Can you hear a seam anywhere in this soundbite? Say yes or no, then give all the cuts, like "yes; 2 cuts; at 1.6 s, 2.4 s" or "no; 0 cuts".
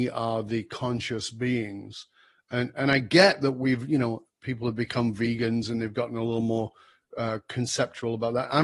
no; 0 cuts